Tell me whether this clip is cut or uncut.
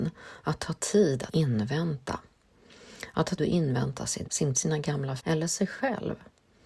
cut